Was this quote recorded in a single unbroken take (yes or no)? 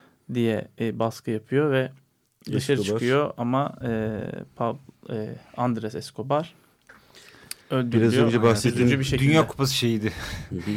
no